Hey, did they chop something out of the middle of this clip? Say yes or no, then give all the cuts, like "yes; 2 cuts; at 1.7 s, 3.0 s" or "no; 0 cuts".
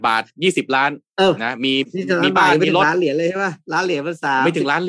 no; 0 cuts